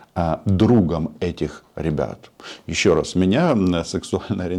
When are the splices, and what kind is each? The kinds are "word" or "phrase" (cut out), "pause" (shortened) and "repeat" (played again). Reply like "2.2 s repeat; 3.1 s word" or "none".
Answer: none